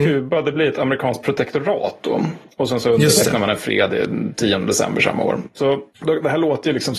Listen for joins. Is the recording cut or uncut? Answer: uncut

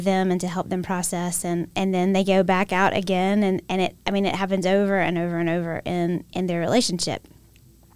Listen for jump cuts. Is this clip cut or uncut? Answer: cut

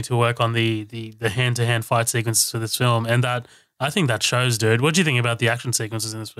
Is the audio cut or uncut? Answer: uncut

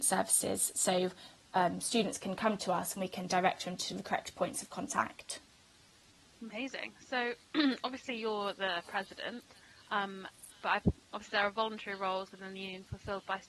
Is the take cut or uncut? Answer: uncut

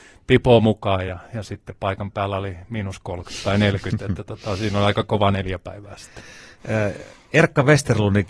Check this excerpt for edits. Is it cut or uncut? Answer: uncut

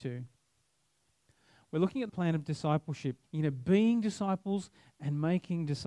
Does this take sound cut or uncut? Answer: cut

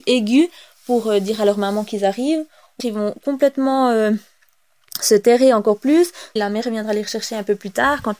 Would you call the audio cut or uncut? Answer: cut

